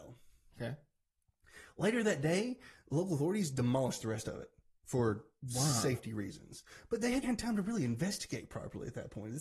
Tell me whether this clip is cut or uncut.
cut